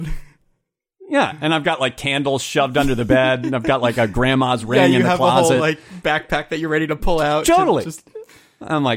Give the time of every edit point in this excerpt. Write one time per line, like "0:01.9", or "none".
none

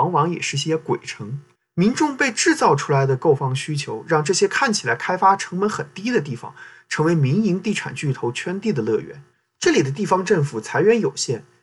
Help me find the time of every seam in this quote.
0:01.6
0:09.3

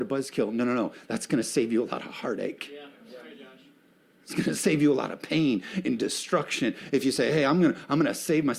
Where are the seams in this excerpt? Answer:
none

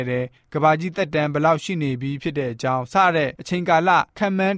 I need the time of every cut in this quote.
0:03.4

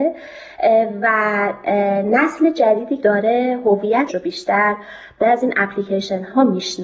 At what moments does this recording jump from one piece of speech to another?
0:03.0
0:04.1
0:05.2

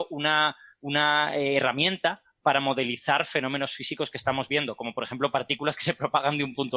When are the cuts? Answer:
none

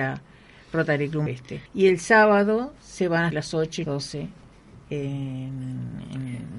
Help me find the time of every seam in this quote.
0:01.3
0:01.7
0:03.3
0:03.8

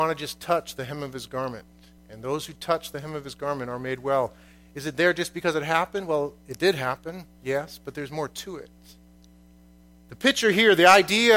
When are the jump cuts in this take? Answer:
none

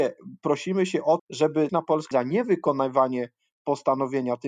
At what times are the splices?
0:01.2
0:01.7
0:02.1

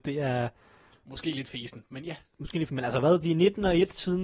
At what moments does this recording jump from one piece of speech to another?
0:02.7

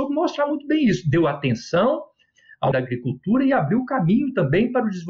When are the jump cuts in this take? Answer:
0:02.7

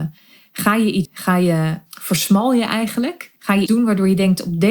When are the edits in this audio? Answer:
0:01.0
0:01.9
0:03.4
0:03.7

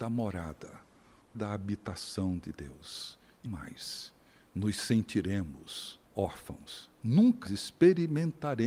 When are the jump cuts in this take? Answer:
0:01.3
0:03.5
0:04.3
0:06.0
0:07.5

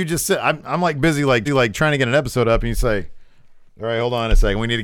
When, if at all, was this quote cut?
0:01.5
0:03.7

